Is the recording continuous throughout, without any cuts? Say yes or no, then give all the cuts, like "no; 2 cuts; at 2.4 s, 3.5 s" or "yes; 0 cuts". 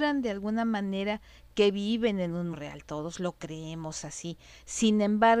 no; 1 cut; at 2.5 s